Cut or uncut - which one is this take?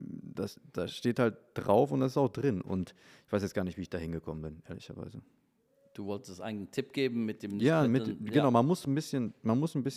uncut